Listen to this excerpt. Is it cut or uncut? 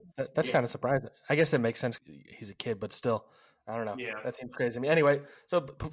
cut